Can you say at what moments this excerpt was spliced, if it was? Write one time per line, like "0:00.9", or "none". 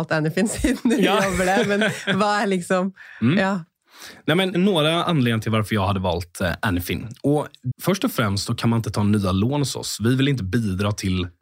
0:04.5
0:07.7